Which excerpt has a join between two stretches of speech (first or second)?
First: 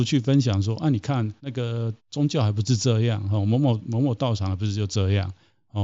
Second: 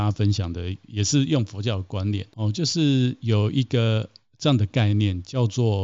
first